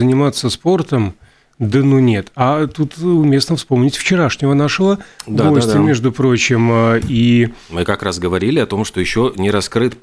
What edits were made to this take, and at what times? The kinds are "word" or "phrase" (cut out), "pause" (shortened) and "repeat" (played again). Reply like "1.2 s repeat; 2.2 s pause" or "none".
none